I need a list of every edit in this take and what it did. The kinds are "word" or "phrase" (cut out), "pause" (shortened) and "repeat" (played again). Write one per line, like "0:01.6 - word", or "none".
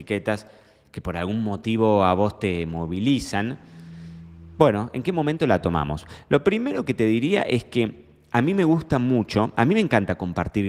none